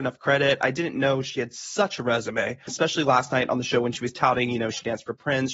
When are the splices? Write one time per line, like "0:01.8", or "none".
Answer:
0:02.7

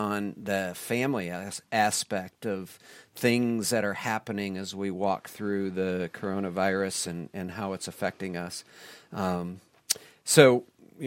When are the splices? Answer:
none

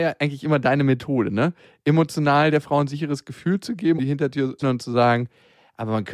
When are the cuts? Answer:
0:04.0
0:04.6

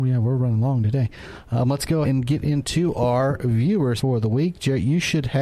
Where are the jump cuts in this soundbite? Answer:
0:02.0
0:04.0

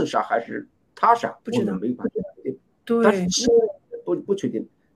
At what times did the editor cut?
0:01.4

